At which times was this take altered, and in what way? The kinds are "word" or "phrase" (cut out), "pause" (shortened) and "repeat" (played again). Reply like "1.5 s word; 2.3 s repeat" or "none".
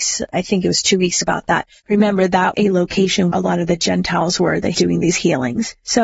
1.2 s phrase; 2.5 s word; 3.3 s word; 4.7 s word